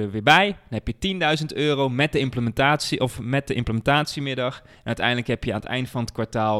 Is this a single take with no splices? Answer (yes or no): yes